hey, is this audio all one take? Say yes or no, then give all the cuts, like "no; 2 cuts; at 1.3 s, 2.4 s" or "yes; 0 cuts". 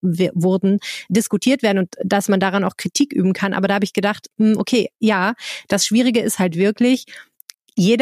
yes; 0 cuts